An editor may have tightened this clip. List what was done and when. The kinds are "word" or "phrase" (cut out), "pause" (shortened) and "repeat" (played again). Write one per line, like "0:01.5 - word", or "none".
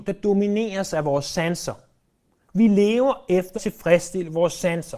0:03.5 - word